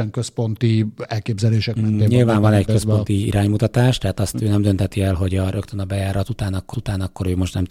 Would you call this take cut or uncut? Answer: cut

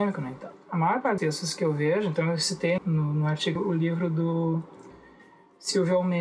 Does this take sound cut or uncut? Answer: cut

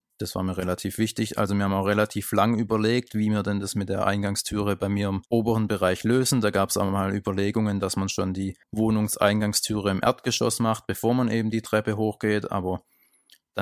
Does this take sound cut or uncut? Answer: cut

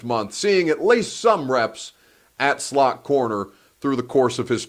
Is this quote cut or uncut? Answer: uncut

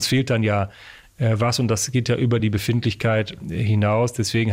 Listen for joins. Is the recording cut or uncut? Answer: uncut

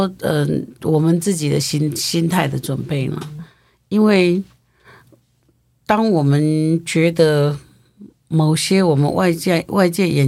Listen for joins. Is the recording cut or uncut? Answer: uncut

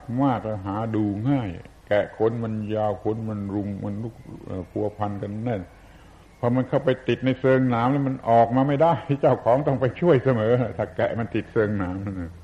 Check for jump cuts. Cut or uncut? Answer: uncut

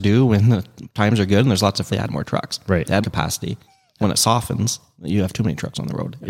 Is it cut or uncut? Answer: cut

